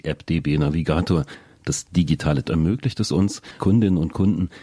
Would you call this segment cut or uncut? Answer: cut